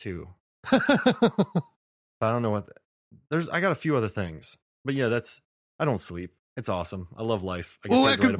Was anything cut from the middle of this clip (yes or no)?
no